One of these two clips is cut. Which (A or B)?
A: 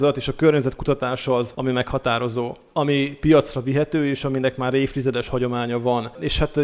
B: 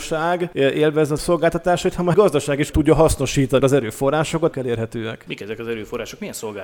B